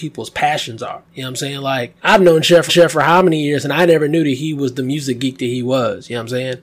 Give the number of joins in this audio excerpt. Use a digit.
2